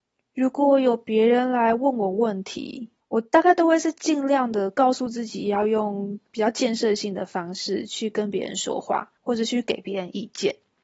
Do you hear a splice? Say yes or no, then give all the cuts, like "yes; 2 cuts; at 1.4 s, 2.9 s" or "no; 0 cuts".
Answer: yes; 2 cuts; at 3.0 s, 9.2 s